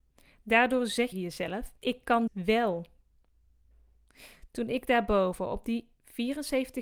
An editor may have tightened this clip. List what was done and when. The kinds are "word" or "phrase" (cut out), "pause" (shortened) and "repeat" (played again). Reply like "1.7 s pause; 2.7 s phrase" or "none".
1.1 s phrase; 1.8 s pause; 2.3 s word